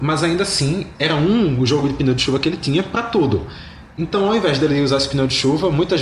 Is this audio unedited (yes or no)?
yes